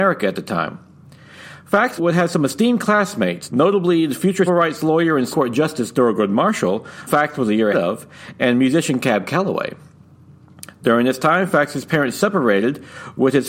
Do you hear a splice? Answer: yes; 6 cuts; at 2.0 s, 3.5 s, 4.5 s, 5.3 s, 7.1 s, 7.7 s

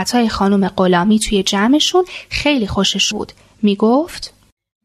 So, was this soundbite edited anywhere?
yes; 1 cut; at 3.1 s

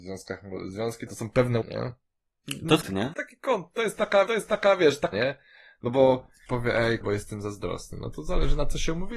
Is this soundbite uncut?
no; 8 cuts; at 1.1 s, 1.6 s, 2.8 s, 3.1 s, 4.3 s, 5.1 s, 6.5 s, 7.0 s

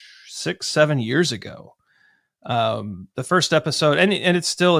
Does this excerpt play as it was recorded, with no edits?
yes; 0 cuts

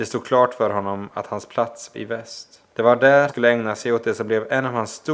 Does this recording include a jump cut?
yes; 3 cuts; at 1.9 s, 2.7 s, 3.3 s

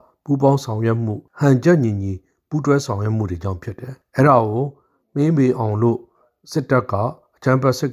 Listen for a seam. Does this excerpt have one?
no; 0 cuts

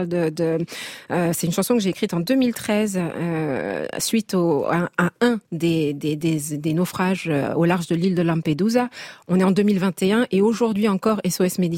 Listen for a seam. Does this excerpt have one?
yes; 1 cut; at 5.4 s

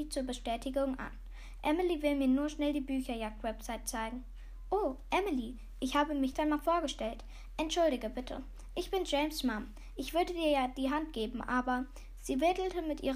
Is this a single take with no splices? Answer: no; 1 cut; at 6.3 s

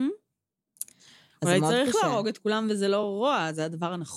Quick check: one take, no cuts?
yes; 0 cuts

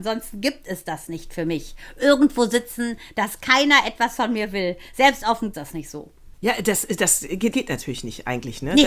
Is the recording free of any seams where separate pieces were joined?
no; 2 cuts; at 5.5 s, 7.5 s

